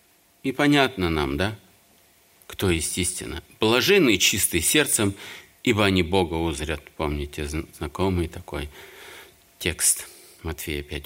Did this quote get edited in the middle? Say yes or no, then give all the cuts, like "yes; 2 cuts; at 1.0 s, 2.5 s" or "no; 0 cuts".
no; 0 cuts